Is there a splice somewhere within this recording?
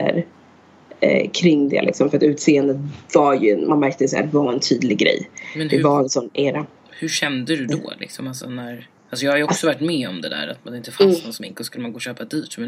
yes; 1 cut; at 9.0 s

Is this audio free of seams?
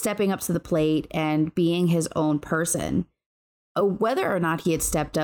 yes; 0 cuts

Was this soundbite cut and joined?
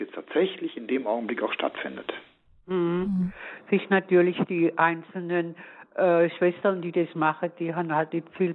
no; 0 cuts

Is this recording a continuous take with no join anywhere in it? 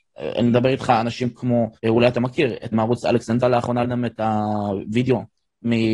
no; 4 cuts; at 1.8 s, 2.7 s, 3.4 s, 3.8 s

